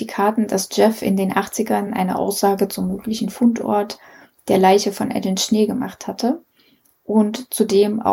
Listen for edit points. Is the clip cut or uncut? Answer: uncut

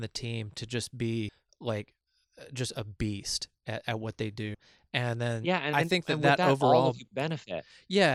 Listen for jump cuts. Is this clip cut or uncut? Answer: uncut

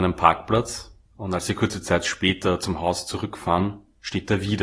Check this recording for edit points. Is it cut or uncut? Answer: cut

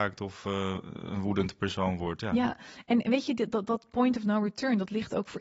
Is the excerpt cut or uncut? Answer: uncut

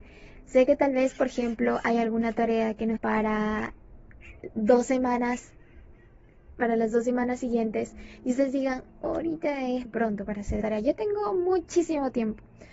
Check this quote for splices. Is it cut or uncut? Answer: cut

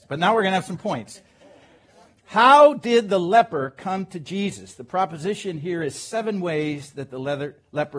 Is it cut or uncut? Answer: uncut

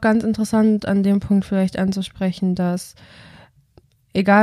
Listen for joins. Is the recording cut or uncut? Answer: uncut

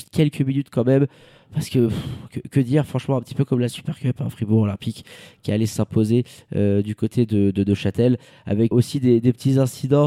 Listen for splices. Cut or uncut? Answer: cut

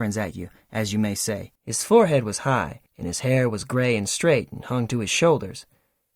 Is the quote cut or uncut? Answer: cut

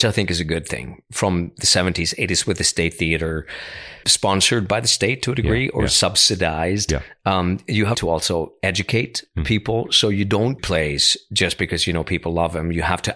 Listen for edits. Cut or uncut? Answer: cut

